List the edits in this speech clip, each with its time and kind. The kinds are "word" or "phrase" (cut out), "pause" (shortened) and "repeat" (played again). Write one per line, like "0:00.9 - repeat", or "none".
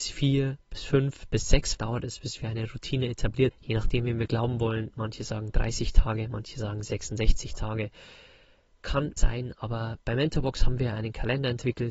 0:01.8 - word
0:03.5 - word
0:09.2 - word

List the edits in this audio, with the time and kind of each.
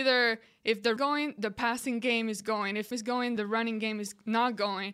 0:01.0 - phrase
0:02.9 - phrase
0:03.4 - word

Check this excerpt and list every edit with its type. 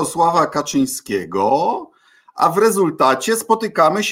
none

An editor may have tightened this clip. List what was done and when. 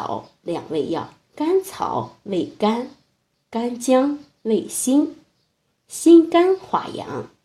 0:01.2 - pause

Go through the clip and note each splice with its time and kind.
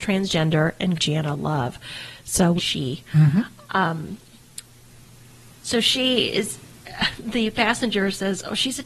0:01.0 - phrase
0:02.6 - phrase

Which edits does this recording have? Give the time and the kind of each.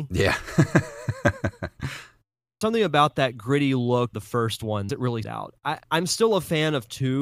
0:02.6 - phrase
0:04.1 - word
0:04.9 - phrase
0:05.2 - word
0:05.8 - pause

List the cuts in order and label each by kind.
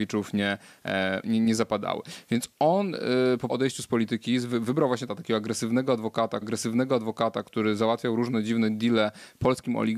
0:01.2 - word
0:03.5 - phrase
0:05.1 - phrase
0:06.4 - repeat

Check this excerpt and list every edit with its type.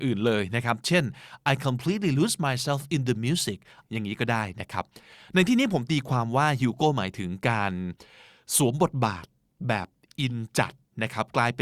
none

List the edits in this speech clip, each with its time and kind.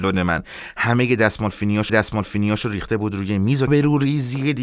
0:01.9 - repeat
0:03.7 - phrase

